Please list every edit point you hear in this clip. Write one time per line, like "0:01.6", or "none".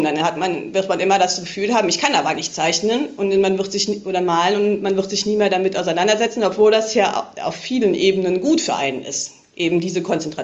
0:02.4